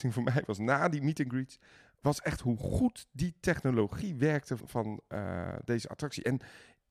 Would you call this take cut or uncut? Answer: cut